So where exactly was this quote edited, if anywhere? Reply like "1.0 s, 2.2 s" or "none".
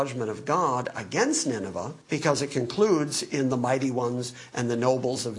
2.0 s

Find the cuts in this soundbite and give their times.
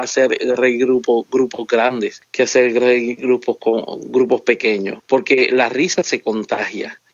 none

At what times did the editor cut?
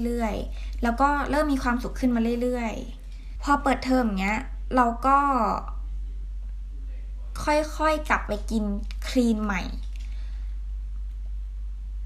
3.4 s

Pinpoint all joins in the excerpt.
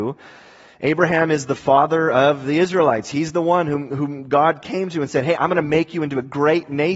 none

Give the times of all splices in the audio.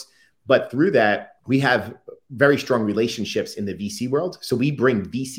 1.4 s

